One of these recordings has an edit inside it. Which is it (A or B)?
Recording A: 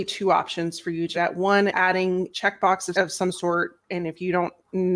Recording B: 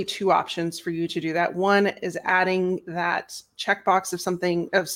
A